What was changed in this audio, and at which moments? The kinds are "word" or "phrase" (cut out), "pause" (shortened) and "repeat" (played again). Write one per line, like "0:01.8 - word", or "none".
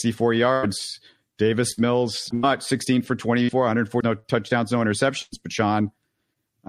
0:02.3 - word
0:04.0 - word

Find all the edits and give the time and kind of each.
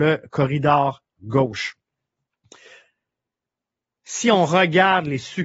0:01.2 - word

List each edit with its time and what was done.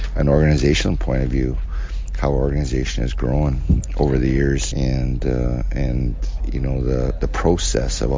0:04.7 - word

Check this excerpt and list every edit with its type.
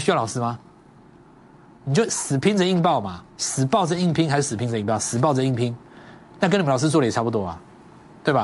0:03.3 - pause

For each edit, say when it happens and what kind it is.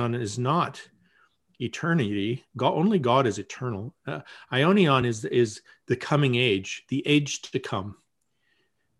none

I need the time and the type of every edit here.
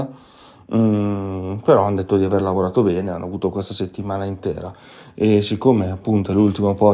none

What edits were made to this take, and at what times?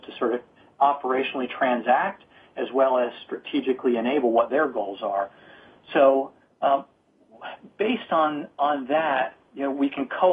none

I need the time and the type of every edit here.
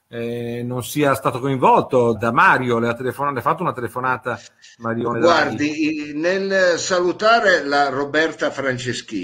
0:02.1 - word

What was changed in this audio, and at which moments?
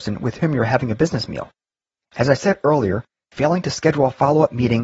none

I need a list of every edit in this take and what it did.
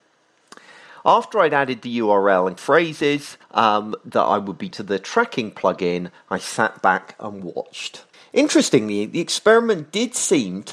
0:02.6 - word
0:03.4 - pause
0:04.7 - word
0:08.1 - pause

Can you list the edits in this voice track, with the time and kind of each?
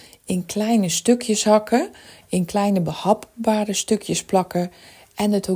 none

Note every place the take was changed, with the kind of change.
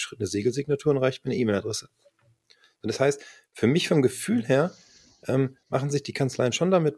none

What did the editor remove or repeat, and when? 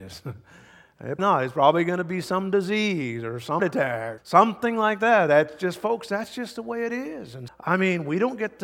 0:01.2 - word
0:03.6 - word
0:04.2 - word
0:07.5 - word

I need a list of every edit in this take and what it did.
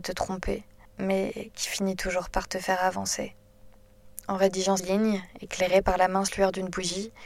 0:04.8 - word

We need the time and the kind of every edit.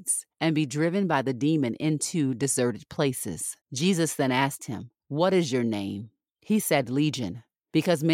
0:03.6 - pause

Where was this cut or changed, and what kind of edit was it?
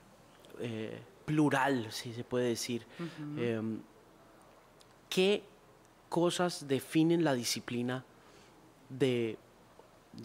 none

